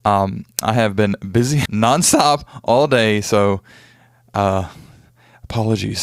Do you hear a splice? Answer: yes; 1 cut; at 1.7 s

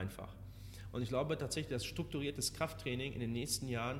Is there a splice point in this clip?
no; 0 cuts

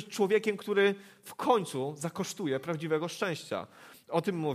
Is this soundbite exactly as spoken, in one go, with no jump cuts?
yes; 0 cuts

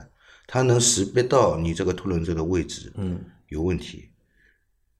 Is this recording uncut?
yes; 0 cuts

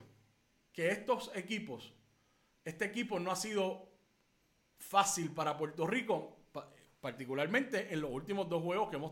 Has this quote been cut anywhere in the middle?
no; 0 cuts

